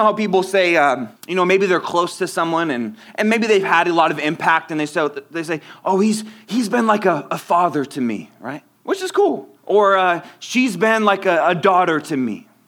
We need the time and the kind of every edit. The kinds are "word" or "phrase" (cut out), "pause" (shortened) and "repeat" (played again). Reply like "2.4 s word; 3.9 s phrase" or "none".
1.2 s pause; 8.7 s pause; 9.6 s pause